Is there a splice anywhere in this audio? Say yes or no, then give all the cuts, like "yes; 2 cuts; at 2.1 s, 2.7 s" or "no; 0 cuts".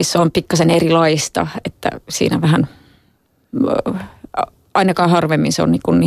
no; 0 cuts